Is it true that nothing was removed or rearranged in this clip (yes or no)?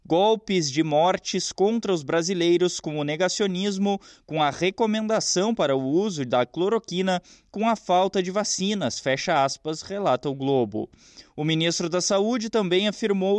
yes